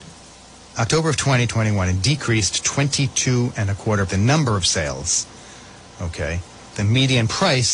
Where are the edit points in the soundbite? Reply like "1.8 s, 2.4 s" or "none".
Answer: 1.5 s, 4.1 s